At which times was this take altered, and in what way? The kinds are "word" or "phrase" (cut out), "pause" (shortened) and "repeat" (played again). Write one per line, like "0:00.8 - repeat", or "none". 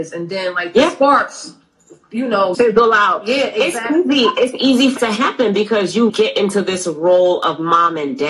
0:02.5 - word
0:05.0 - word
0:06.1 - word